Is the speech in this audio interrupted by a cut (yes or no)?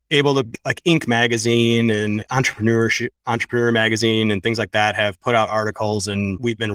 no